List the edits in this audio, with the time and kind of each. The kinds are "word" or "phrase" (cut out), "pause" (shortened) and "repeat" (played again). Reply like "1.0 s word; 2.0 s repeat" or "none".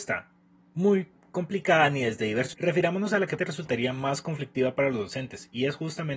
2.5 s word; 3.4 s word